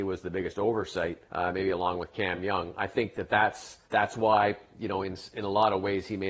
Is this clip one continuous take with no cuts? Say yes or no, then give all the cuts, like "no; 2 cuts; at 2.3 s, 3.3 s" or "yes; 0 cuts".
no; 2 cuts; at 1.3 s, 3.8 s